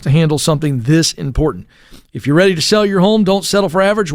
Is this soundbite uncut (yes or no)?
yes